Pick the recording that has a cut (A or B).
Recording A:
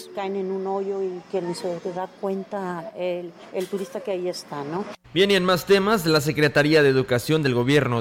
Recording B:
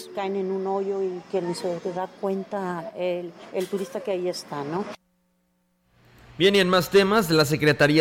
A